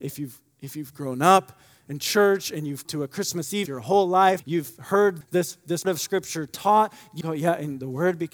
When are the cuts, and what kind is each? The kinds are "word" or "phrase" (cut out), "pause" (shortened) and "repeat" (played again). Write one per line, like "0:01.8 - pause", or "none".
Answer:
0:02.8 - word
0:03.7 - word
0:04.4 - word
0:05.2 - word
0:05.8 - word
0:07.2 - word